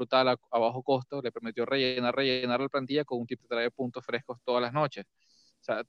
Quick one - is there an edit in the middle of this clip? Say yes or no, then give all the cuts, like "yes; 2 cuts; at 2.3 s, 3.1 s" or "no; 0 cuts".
yes; 2 cuts; at 2.1 s, 3.4 s